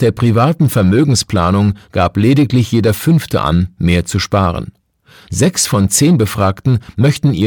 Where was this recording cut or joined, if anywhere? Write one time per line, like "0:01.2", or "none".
none